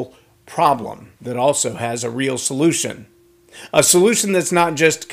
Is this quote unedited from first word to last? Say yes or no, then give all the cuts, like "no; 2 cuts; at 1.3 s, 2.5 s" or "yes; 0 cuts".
no; 1 cut; at 1.2 s